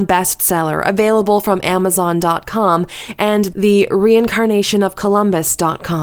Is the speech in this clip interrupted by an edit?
no; 0 cuts

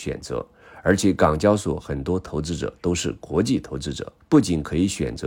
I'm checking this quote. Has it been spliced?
yes; 1 cut; at 4.2 s

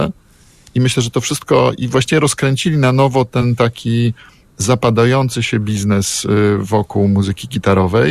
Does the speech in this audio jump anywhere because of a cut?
no; 0 cuts

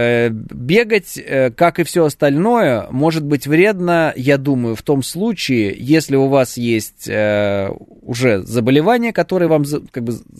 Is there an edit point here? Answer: no; 0 cuts

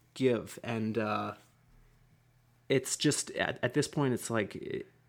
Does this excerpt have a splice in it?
no; 0 cuts

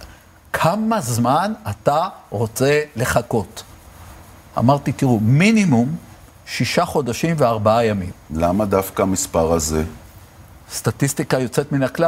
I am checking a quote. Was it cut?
no; 0 cuts

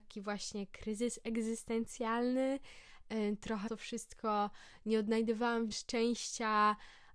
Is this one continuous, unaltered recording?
no; 2 cuts; at 3.7 s, 5.7 s

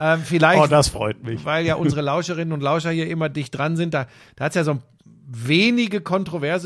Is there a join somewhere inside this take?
no; 0 cuts

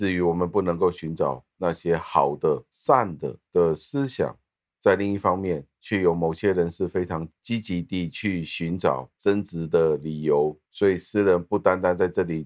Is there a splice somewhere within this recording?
yes; 2 cuts; at 4.6 s, 10.6 s

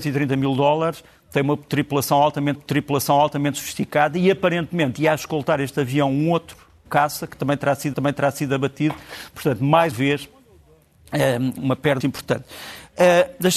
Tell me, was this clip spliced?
yes; 6 cuts; at 2.5 s, 6.9 s, 7.9 s, 9.9 s, 11.6 s, 12.0 s

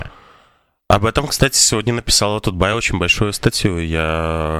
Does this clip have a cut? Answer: no; 0 cuts

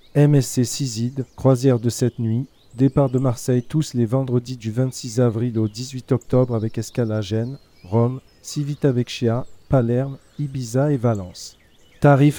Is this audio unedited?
no; 1 cut; at 1.3 s

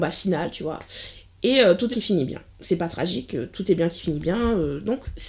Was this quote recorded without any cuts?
no; 2 cuts; at 1.9 s, 2.5 s

